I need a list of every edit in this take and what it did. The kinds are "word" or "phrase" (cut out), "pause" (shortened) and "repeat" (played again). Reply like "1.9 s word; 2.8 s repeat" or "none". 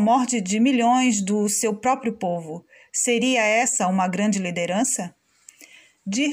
none